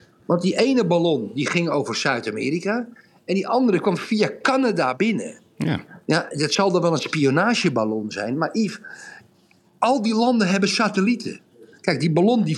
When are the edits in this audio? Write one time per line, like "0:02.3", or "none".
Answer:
0:06.3